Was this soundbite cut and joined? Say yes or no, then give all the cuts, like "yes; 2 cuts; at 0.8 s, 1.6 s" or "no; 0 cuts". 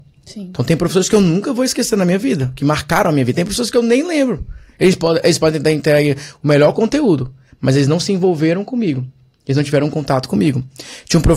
no; 0 cuts